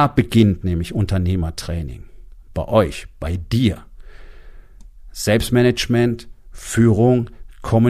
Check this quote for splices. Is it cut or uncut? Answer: cut